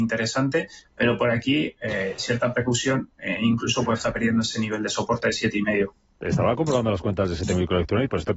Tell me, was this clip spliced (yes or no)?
no